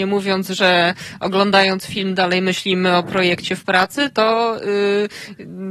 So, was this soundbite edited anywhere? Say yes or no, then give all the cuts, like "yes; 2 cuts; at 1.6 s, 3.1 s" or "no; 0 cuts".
no; 0 cuts